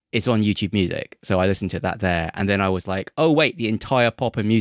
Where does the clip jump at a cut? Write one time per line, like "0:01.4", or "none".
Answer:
none